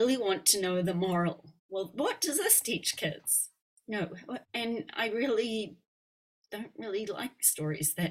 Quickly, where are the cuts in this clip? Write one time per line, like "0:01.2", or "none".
0:01.6
0:04.4

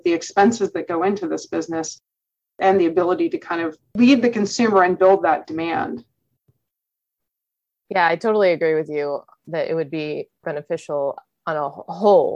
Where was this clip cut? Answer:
none

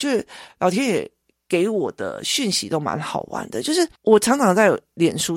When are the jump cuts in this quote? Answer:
none

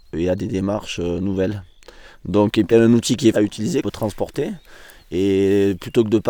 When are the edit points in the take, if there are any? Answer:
0:02.7
0:03.3
0:03.8

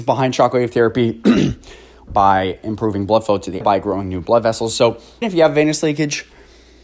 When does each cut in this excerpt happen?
0:02.1
0:03.6
0:05.2

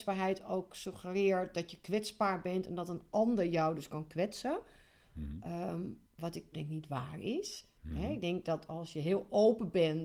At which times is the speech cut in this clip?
0:06.1
0:06.5

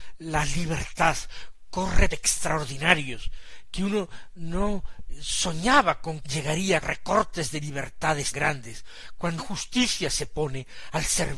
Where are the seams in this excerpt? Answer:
0:02.1
0:06.2
0:06.8
0:08.3
0:09.4

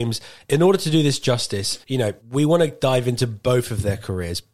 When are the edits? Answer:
0:01.8
0:02.2

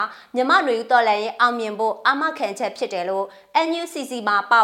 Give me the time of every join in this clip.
none

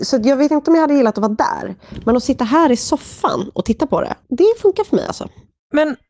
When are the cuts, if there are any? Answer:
0:04.2

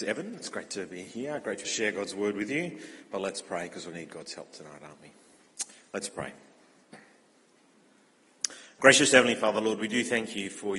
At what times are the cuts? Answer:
0:01.6
0:03.9

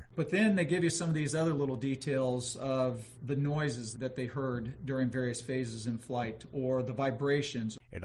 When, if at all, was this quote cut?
0:03.9

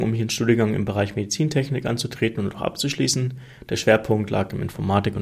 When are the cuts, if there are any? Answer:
none

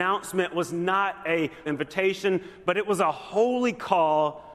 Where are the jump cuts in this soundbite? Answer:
0:01.7

